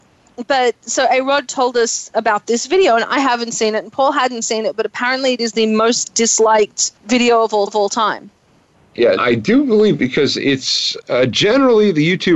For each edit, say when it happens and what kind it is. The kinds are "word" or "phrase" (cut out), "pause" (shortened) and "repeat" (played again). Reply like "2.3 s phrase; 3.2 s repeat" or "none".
7.0 s pause; 7.7 s repeat; 9.2 s word